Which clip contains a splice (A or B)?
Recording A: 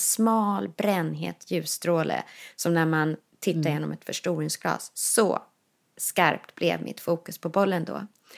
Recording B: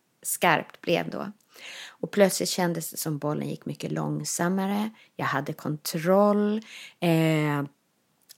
B